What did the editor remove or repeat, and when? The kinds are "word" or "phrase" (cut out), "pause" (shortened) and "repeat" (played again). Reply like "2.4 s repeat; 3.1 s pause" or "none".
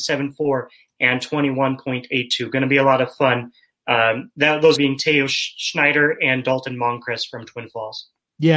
4.7 s word